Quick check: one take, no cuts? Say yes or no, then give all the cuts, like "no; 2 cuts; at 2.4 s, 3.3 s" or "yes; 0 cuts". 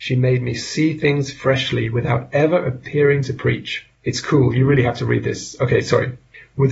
no; 1 cut; at 4.0 s